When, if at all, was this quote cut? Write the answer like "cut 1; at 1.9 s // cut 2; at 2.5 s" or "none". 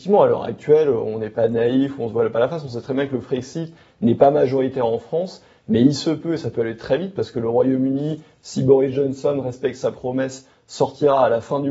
none